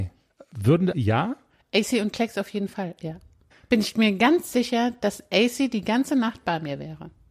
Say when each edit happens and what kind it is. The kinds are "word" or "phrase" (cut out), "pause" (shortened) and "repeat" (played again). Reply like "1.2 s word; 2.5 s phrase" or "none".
0.9 s word; 3.5 s pause